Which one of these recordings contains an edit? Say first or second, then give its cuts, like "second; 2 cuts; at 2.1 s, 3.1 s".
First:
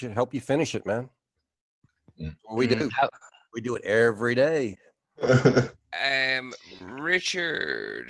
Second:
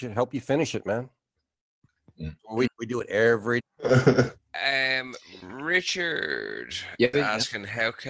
second; 3 cuts; at 2.7 s, 3.6 s, 7.1 s